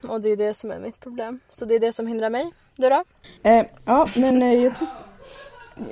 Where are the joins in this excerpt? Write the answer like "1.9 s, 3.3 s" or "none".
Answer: 3.4 s, 4.3 s